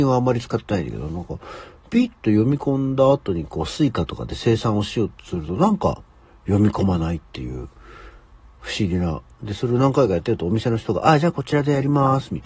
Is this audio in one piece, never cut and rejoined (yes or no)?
yes